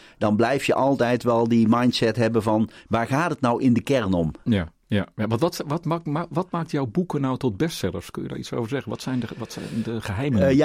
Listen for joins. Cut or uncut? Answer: uncut